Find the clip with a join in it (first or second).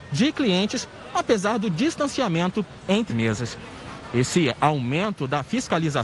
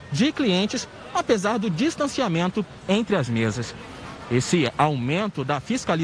first